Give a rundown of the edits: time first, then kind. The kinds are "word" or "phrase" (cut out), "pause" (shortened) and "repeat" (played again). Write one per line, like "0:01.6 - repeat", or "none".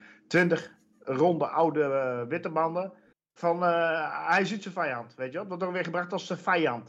0:03.1 - pause